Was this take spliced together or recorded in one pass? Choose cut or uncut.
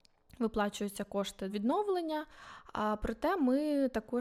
cut